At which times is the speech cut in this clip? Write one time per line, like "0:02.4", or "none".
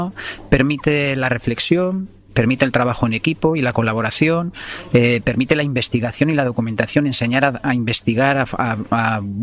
none